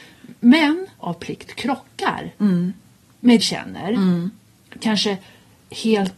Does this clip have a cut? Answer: yes; 2 cuts; at 1.0 s, 3.4 s

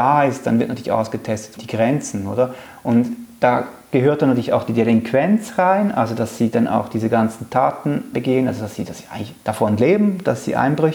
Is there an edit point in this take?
yes; 2 cuts; at 1.6 s, 8.1 s

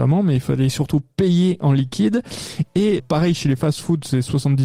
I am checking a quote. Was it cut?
yes; 1 cut; at 3.0 s

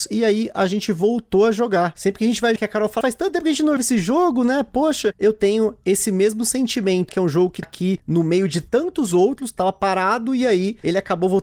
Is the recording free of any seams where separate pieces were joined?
no; 5 cuts; at 2.6 s, 3.0 s, 3.8 s, 7.1 s, 7.6 s

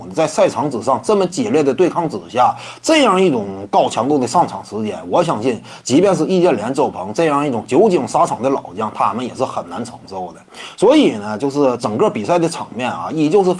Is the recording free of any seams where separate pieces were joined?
yes; 0 cuts

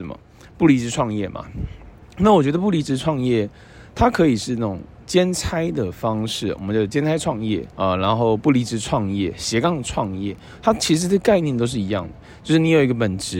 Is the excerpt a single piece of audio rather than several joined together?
no; 2 cuts; at 2.0 s, 7.7 s

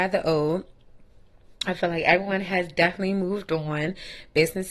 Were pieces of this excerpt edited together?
no; 0 cuts

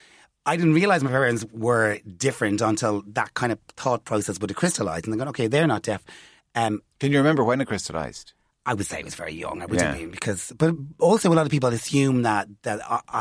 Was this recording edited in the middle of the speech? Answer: no; 0 cuts

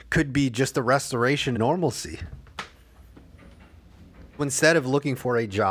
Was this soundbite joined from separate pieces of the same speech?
yes; 2 cuts; at 1.5 s, 4.4 s

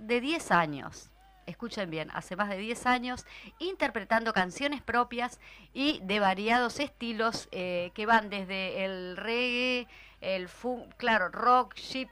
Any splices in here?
no; 0 cuts

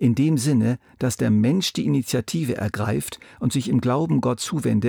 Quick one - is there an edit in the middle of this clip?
no; 0 cuts

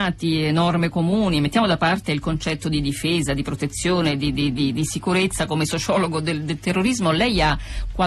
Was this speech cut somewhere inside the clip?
no; 0 cuts

